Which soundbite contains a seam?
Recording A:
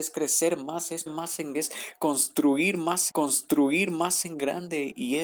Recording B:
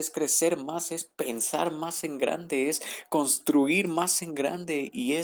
A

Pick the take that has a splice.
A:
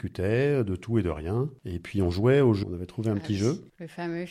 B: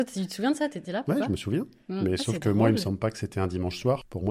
A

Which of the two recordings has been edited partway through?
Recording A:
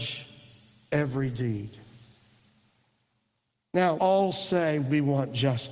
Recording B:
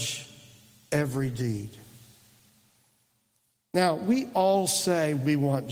A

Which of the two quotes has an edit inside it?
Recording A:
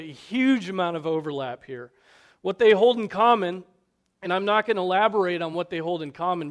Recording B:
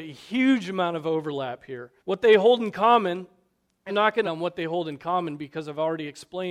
B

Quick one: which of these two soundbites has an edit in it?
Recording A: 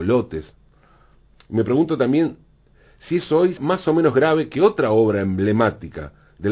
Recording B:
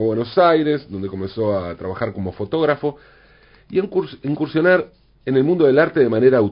A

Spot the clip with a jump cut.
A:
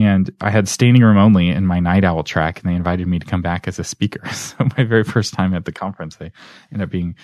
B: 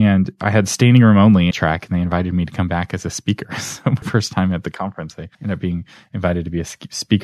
B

